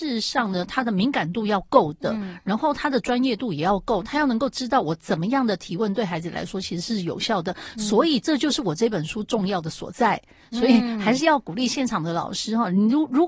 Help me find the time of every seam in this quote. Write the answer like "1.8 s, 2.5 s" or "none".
none